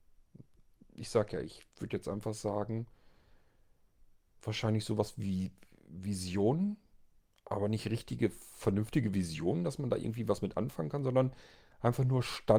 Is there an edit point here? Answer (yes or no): no